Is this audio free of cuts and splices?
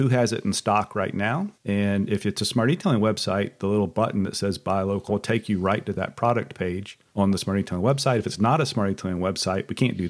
no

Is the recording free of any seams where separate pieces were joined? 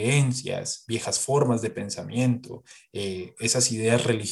yes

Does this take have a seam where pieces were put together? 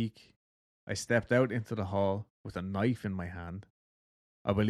no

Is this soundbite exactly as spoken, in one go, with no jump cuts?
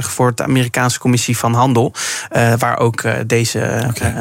yes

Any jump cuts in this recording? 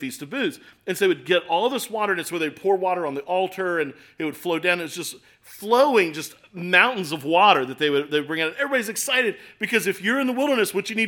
no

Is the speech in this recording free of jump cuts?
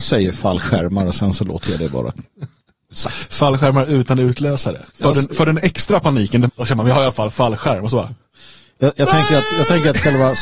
no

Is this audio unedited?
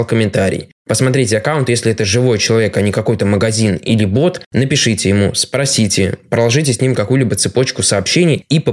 no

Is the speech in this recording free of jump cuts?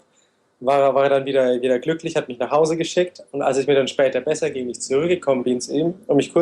yes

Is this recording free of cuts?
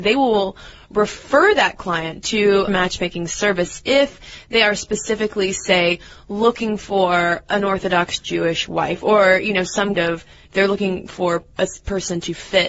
no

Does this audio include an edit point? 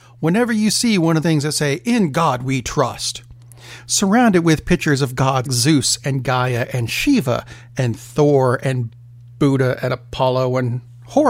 yes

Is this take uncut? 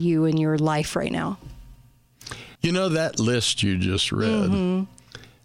no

